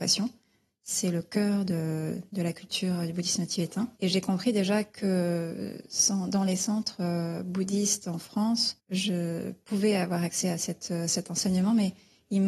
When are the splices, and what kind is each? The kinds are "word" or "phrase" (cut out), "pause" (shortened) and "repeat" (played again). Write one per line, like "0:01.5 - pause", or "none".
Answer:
0:03.9 - pause